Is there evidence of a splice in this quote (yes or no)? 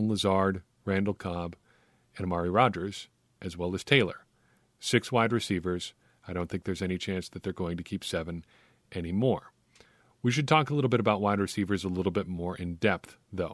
no